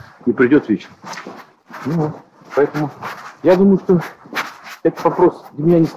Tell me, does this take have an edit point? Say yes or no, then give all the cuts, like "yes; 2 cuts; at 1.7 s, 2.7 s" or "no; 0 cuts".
no; 0 cuts